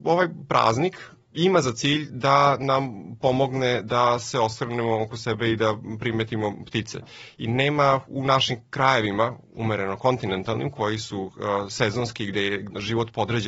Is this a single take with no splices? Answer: no; 1 cut; at 9.4 s

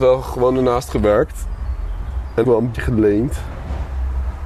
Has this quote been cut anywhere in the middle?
yes; 2 cuts; at 2.4 s, 2.7 s

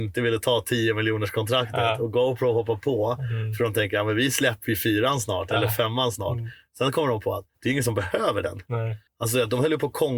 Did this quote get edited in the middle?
yes; 2 cuts; at 7.5 s, 9.1 s

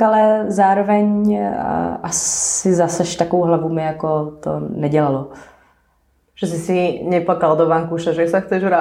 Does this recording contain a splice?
no; 0 cuts

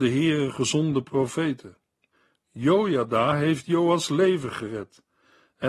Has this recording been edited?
no; 0 cuts

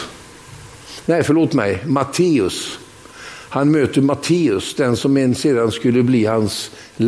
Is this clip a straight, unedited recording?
yes; 0 cuts

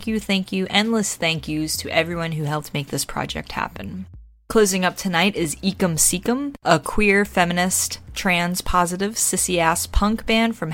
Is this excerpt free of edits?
yes; 0 cuts

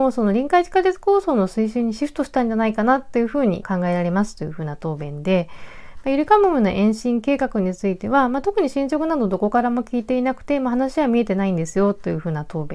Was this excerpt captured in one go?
no; 1 cut; at 3.6 s

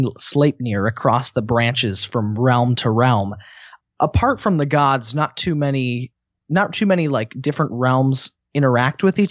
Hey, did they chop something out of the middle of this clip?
no; 0 cuts

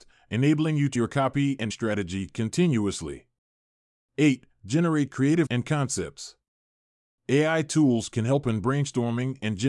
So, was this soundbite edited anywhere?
yes; 3 cuts; at 1.0 s, 1.7 s, 5.5 s

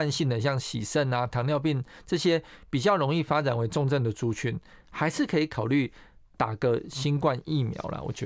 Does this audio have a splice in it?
no; 0 cuts

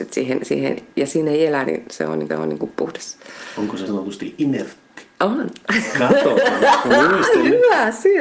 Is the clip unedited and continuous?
no; 3 cuts; at 1.6 s, 2.3 s, 3.9 s

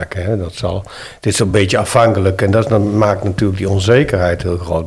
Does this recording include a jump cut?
no; 0 cuts

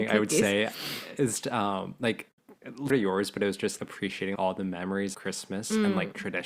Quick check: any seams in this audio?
yes; 5 cuts; at 1.4 s, 2.9 s, 3.8 s, 4.3 s, 5.1 s

